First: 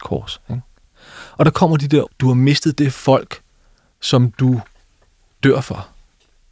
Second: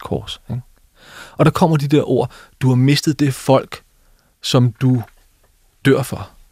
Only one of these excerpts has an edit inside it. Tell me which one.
first; 1 cut; at 2.1 s

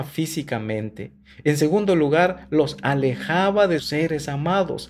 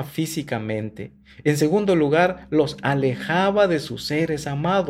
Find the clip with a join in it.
first; 1 cut; at 3.8 s

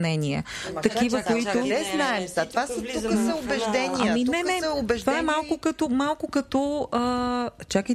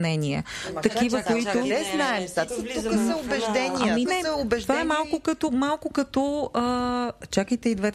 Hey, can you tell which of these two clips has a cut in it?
second; 2 cuts; at 2.5 s, 4.0 s

